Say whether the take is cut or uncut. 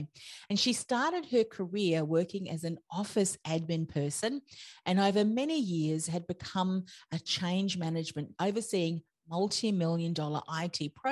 cut